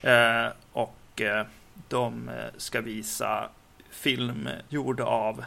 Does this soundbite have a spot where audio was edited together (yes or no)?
no